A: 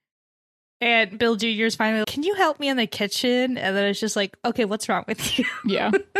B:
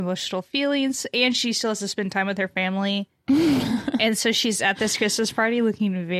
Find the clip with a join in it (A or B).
A